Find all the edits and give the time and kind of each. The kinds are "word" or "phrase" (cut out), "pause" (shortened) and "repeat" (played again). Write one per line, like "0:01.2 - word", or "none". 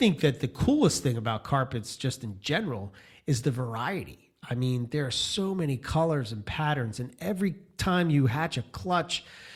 none